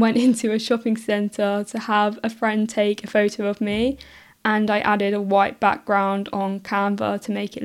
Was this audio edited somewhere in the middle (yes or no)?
no